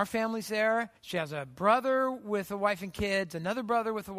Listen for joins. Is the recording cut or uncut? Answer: cut